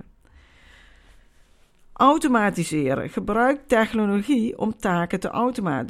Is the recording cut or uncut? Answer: uncut